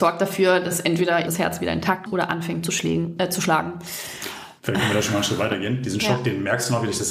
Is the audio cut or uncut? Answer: cut